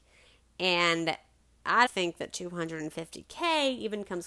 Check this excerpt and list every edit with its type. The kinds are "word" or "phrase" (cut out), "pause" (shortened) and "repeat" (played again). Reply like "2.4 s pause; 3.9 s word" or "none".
1.9 s word